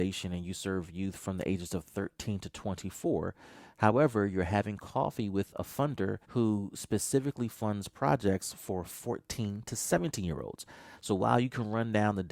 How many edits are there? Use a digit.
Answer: 1